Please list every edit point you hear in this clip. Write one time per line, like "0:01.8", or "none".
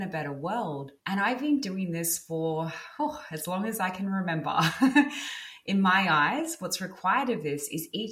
0:01.0